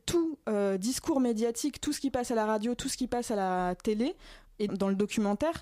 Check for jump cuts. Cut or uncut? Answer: cut